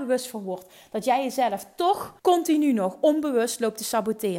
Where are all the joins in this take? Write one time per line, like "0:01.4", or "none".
0:02.2